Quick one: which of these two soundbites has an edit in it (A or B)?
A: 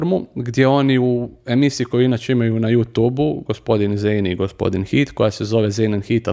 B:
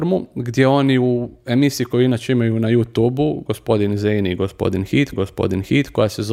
B